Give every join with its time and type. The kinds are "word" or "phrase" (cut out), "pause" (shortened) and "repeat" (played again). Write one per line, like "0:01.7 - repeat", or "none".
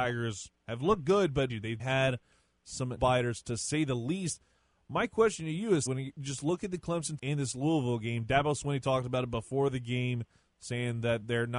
0:01.5 - word
0:01.8 - word
0:03.0 - word
0:05.9 - word
0:07.2 - word